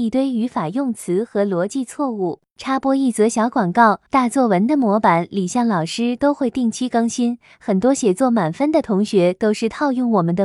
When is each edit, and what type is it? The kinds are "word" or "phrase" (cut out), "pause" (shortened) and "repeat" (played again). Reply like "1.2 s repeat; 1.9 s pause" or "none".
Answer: 4.1 s pause